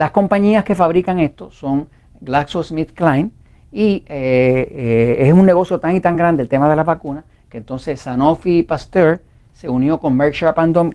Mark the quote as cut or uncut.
uncut